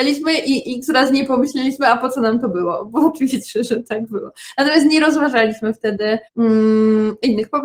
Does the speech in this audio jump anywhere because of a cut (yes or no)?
yes